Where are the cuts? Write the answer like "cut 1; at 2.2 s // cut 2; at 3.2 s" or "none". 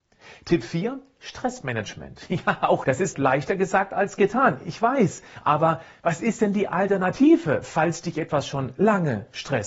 cut 1; at 2.8 s // cut 2; at 3.1 s